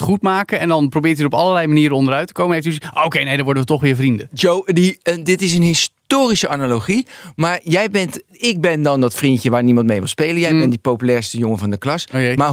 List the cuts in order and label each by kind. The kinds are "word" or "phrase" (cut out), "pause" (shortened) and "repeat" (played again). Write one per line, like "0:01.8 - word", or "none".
0:08.3 - word